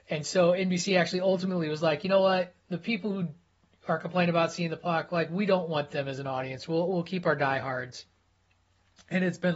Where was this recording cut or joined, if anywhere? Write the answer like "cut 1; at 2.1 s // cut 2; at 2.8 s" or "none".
none